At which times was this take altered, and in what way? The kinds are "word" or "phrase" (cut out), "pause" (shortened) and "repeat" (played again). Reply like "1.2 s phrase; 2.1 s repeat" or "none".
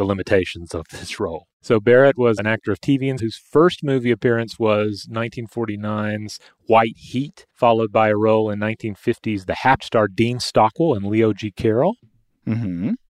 1.5 s pause; 2.4 s word; 3.2 s phrase; 7.5 s pause; 9.8 s phrase